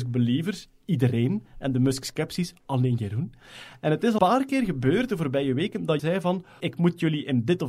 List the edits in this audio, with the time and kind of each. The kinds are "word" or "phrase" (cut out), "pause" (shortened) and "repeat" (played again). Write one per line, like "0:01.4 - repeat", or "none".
0:04.2 - word
0:06.0 - word
0:06.6 - word